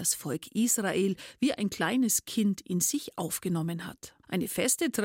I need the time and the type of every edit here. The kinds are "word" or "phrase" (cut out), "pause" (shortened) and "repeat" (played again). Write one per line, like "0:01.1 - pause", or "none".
none